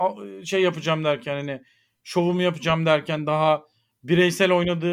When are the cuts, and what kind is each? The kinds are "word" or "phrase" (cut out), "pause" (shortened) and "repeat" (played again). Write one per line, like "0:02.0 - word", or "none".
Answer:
none